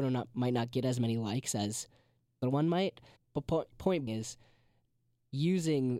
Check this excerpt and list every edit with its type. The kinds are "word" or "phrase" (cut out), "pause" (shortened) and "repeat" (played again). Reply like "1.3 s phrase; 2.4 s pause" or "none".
2.4 s word; 3.2 s pause; 4.1 s word